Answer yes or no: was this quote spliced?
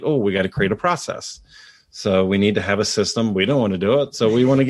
no